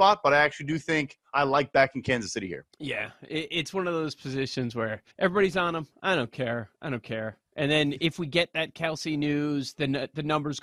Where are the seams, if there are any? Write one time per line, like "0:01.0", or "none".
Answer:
0:02.7
0:05.1
0:06.7